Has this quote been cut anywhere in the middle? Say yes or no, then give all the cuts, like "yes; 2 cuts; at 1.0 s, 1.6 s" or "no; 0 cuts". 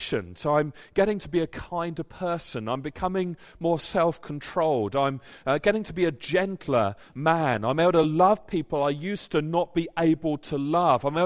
no; 0 cuts